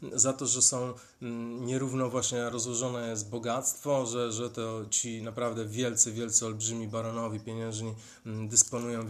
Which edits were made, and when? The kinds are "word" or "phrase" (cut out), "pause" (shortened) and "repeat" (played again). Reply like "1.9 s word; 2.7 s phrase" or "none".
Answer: none